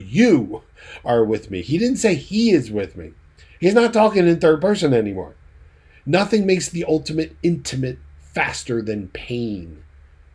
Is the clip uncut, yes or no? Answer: yes